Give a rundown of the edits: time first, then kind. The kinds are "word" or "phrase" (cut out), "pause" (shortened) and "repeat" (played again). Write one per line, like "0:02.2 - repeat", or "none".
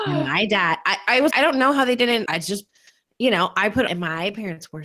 0:01.3 - word
0:02.3 - word
0:03.9 - word

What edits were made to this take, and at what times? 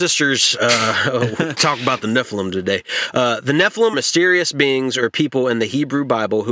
0:01.5 - phrase
0:03.9 - word

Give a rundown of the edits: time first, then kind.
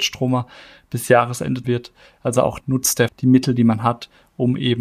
0:01.6 - word
0:02.6 - word
0:03.1 - word

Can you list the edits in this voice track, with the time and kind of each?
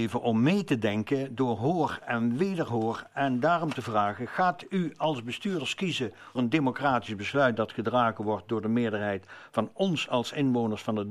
0:06.4 - word

